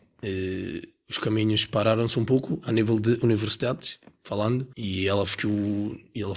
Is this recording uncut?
no; 1 cut; at 4.7 s

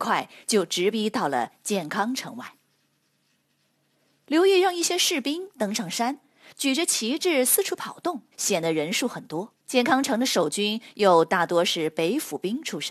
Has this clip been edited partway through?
yes; 2 cuts; at 8.3 s, 9.6 s

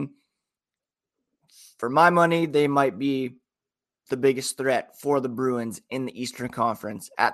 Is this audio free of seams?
yes; 0 cuts

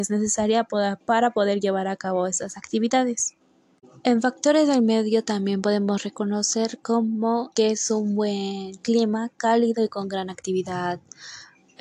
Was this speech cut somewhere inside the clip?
yes; 2 cuts; at 1.0 s, 7.5 s

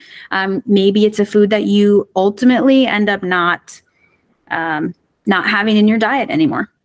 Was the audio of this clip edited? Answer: no; 0 cuts

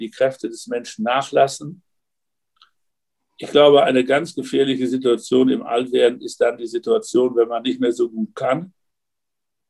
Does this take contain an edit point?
no; 0 cuts

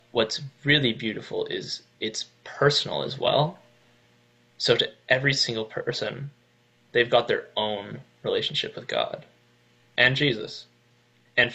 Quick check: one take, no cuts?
yes; 0 cuts

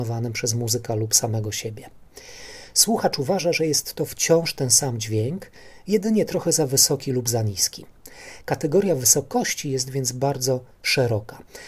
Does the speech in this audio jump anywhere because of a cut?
no; 0 cuts

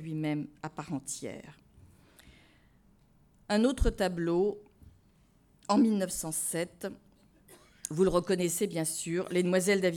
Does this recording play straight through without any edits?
yes; 0 cuts

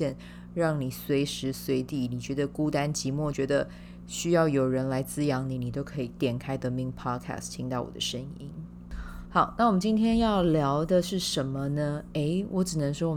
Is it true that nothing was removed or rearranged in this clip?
no; 1 cut; at 3.3 s

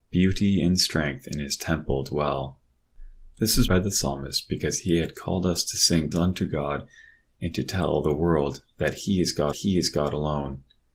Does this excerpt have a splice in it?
yes; 3 cuts; at 3.7 s, 6.1 s, 9.5 s

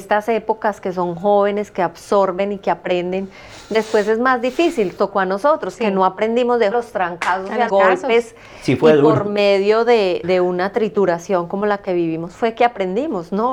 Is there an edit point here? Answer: yes; 4 cuts; at 5.0 s, 6.7 s, 7.7 s, 10.2 s

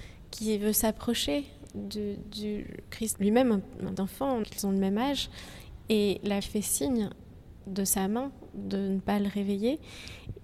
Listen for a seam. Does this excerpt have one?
yes; 4 cuts; at 3.1 s, 4.0 s, 4.4 s, 6.4 s

